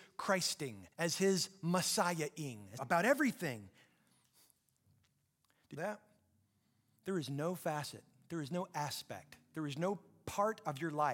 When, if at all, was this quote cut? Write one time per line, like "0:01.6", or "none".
0:00.9
0:02.8
0:05.8